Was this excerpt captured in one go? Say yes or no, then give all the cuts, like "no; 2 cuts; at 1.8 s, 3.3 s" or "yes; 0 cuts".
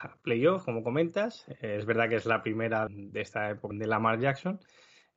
no; 2 cuts; at 2.9 s, 3.7 s